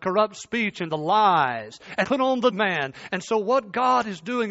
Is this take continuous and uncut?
no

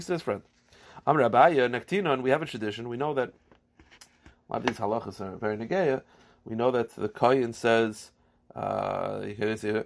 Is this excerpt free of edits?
yes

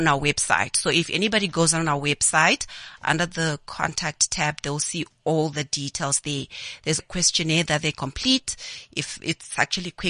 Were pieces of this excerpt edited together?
yes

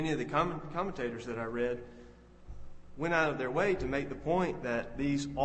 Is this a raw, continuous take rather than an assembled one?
yes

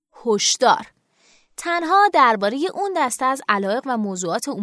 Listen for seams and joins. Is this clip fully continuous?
yes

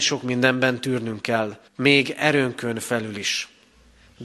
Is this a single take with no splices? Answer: no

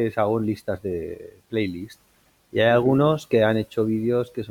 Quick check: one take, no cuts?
yes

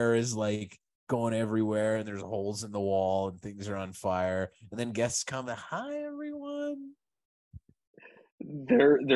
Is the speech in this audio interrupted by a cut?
no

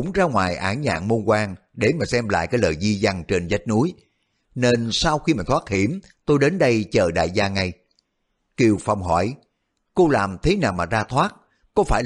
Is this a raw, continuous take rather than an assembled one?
yes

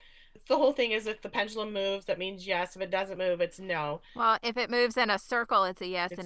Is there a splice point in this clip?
no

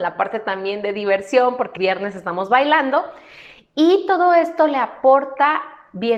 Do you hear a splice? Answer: yes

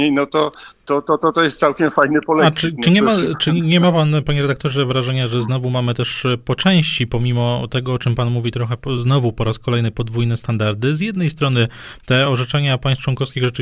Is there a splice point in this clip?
no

